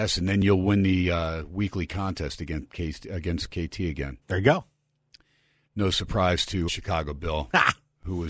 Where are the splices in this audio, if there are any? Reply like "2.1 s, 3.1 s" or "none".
4.2 s, 6.7 s

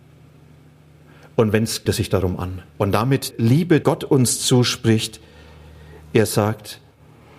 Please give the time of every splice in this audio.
1.9 s, 2.7 s, 3.3 s, 3.8 s

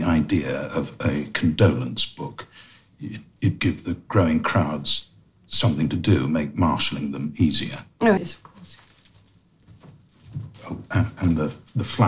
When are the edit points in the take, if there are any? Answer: 3.6 s, 8.2 s, 10.5 s

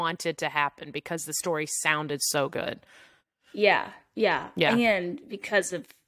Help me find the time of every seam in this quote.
none

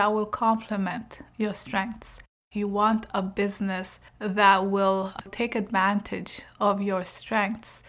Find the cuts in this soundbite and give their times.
none

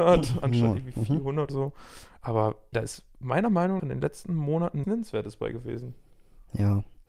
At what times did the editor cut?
1.5 s, 2.7 s, 3.8 s, 4.8 s

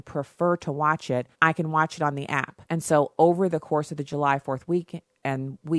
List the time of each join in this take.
1.3 s, 2.6 s

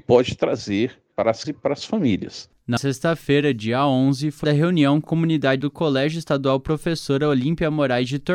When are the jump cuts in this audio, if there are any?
1.1 s, 1.4 s, 2.8 s, 4.4 s, 5.0 s, 5.6 s

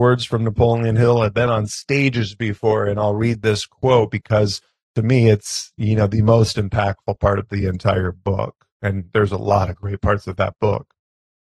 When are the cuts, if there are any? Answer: none

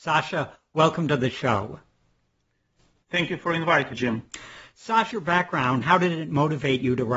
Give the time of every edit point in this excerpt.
3.9 s, 5.1 s, 5.8 s

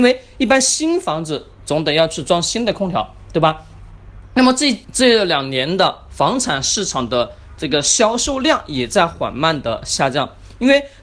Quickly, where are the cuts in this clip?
4.8 s

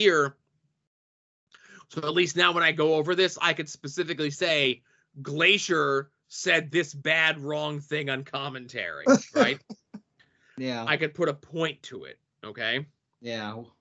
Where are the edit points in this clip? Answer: none

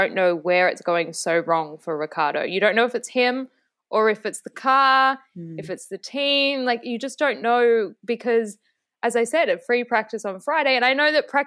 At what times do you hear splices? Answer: none

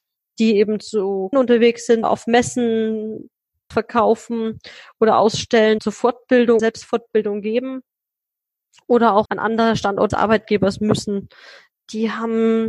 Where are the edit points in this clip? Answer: 1.3 s, 2.0 s, 3.7 s, 5.8 s, 6.6 s, 9.3 s, 10.1 s

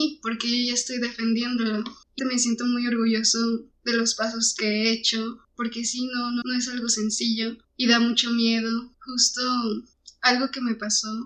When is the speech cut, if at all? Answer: 2.2 s, 6.4 s

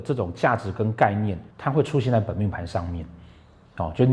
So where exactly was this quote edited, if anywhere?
1.5 s

